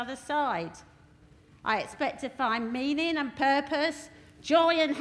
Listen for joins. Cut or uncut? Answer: uncut